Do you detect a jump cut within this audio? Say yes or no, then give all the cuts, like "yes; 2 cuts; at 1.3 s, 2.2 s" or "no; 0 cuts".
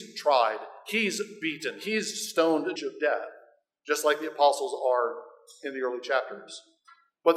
yes; 1 cut; at 2.8 s